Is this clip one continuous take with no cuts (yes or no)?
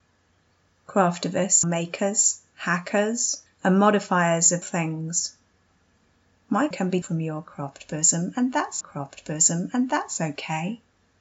no